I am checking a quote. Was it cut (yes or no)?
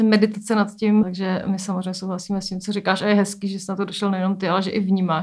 yes